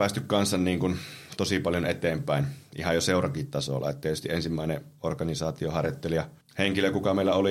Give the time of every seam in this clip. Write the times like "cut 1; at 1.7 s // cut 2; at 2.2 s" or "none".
cut 1; at 6.4 s